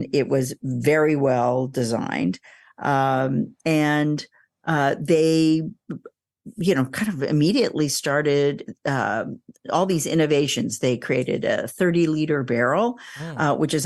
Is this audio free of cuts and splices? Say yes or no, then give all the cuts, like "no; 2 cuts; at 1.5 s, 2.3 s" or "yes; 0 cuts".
yes; 0 cuts